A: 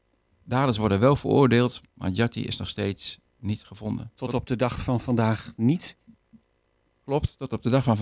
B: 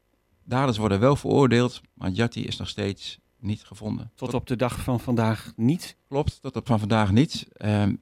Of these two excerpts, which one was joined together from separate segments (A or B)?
B